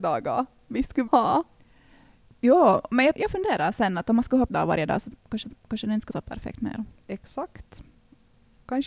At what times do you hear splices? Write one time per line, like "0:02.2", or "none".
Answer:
0:01.1
0:03.1
0:04.5
0:05.4
0:06.1
0:07.0